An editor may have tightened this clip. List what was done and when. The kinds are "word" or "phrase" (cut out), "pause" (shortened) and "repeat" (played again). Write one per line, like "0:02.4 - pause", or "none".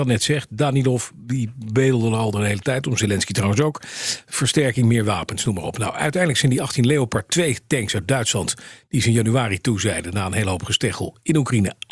none